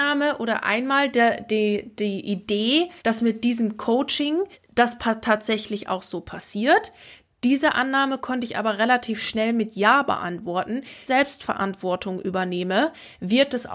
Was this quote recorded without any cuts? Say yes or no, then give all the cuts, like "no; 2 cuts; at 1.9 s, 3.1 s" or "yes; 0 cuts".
no; 3 cuts; at 3.0 s, 4.5 s, 11.1 s